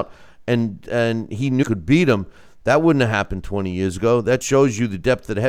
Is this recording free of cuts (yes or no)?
no